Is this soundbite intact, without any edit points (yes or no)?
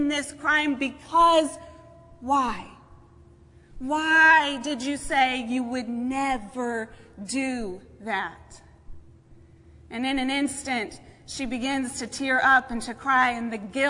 yes